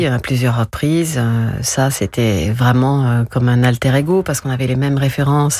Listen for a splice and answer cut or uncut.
uncut